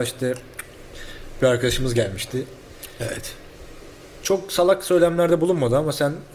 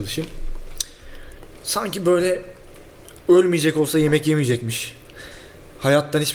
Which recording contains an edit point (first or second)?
first